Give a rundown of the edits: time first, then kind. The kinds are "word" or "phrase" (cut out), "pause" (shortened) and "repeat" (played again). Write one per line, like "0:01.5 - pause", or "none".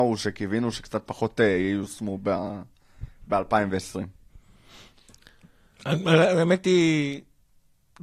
none